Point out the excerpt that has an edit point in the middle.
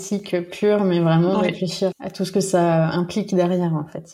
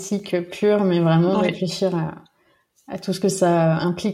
first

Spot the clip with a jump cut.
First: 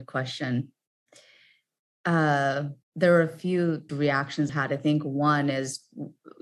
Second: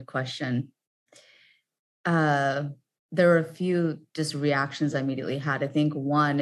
first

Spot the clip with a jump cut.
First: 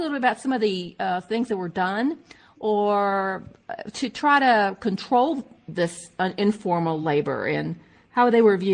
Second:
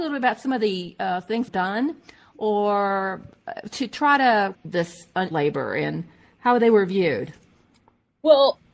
second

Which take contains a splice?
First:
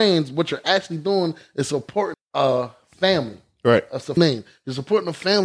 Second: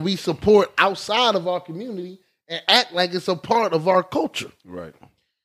first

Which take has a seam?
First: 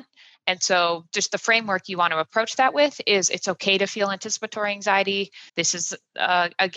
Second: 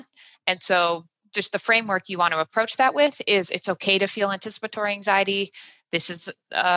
first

